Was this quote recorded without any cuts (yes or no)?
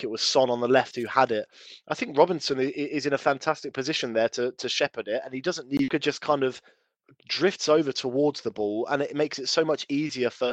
no